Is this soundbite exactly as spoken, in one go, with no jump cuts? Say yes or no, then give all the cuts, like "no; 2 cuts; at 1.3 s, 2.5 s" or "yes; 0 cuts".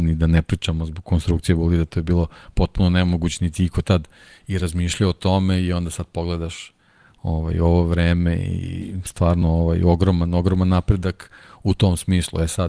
yes; 0 cuts